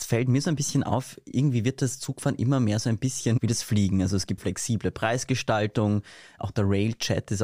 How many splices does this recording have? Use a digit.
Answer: 1